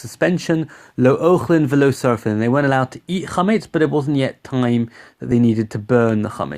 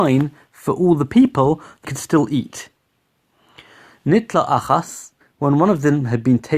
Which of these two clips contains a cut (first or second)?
second